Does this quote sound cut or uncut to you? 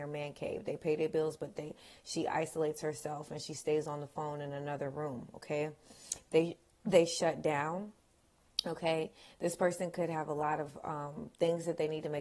uncut